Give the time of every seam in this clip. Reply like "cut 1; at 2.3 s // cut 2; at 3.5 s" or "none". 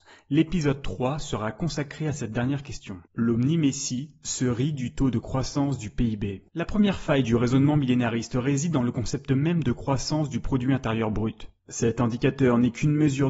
cut 1; at 3.1 s // cut 2; at 6.5 s // cut 3; at 11.6 s